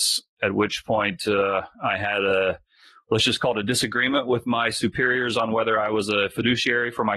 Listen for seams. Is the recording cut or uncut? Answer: uncut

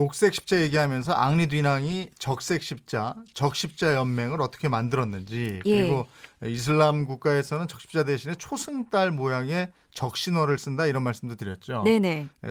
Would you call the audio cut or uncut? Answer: uncut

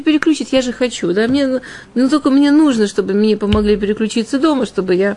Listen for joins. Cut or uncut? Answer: uncut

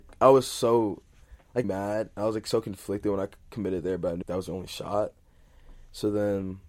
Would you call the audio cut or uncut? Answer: cut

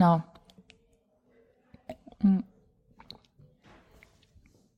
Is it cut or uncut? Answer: uncut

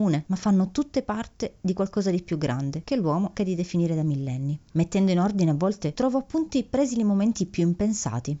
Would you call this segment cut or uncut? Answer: cut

